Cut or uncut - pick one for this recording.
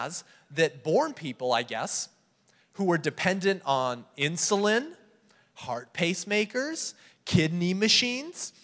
uncut